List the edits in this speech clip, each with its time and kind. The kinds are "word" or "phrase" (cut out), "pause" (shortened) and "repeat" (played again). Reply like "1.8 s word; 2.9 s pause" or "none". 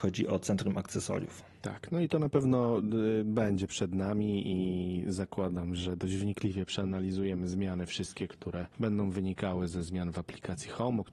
none